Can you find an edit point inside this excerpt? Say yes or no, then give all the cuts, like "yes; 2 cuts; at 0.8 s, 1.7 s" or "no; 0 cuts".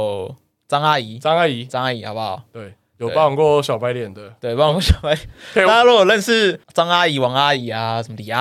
yes; 1 cut; at 6.6 s